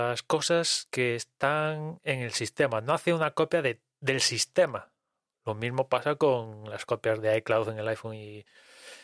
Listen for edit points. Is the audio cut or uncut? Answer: uncut